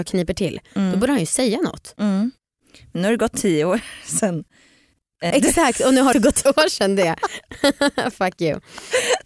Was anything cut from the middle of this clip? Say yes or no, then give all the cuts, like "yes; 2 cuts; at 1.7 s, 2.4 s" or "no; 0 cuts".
yes; 3 cuts; at 5.3 s, 6.1 s, 6.5 s